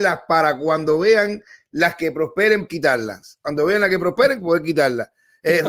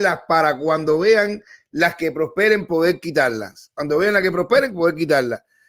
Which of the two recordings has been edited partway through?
first; 1 cut; at 2.7 s

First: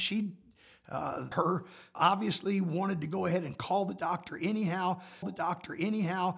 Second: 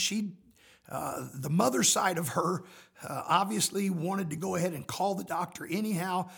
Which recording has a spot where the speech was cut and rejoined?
first; 3 cuts; at 1.3 s, 1.9 s, 5.2 s

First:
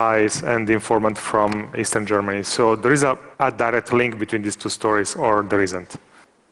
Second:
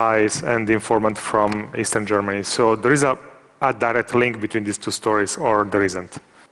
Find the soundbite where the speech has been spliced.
first; 1 cut; at 3.3 s

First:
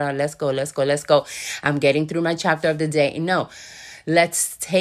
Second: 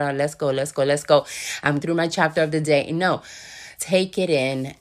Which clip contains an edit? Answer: second; 2 cuts; at 1.8 s, 3.8 s

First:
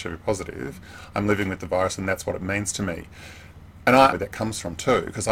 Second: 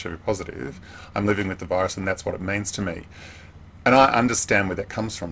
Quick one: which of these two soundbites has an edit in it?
first; 1 cut; at 4.1 s

